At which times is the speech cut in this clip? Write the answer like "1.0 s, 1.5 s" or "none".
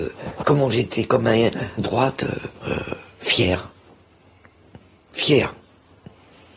1.8 s, 2.6 s

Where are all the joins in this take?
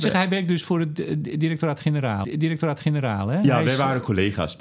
2.2 s

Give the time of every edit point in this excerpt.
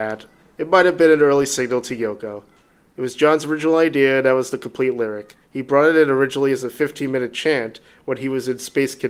5.4 s

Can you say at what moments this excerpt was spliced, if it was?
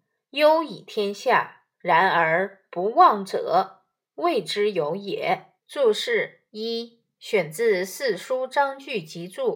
1.7 s, 5.6 s, 6.5 s

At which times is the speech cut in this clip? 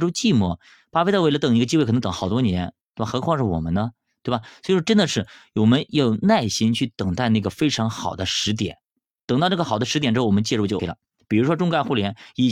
10.8 s

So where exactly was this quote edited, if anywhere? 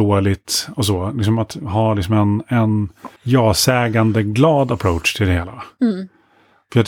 3.2 s

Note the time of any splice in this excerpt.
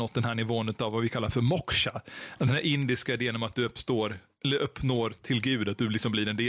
none

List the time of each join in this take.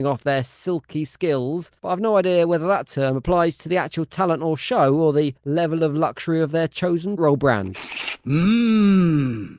1.8 s, 5.4 s, 7.2 s

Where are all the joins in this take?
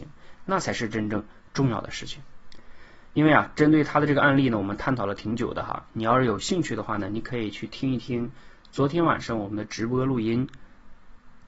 none

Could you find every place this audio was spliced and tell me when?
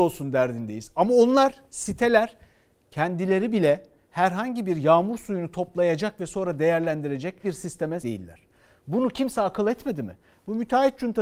7.4 s, 8.0 s

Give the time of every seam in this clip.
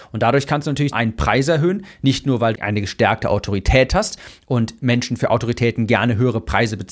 0.9 s, 2.5 s

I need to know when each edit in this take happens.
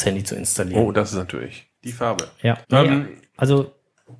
1.8 s, 2.6 s

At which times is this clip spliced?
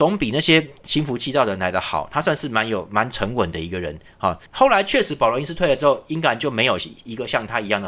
4.5 s

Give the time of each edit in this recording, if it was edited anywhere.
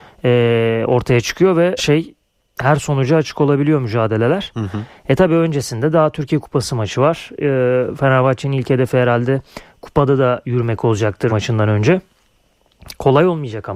1.8 s, 2.3 s, 11.3 s

